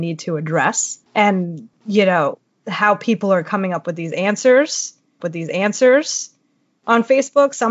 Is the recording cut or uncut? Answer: cut